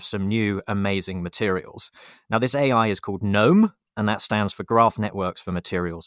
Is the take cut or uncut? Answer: uncut